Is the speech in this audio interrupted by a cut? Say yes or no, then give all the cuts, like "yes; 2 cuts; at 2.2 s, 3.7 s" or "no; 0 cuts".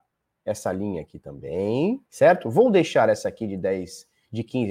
yes; 1 cut; at 2.1 s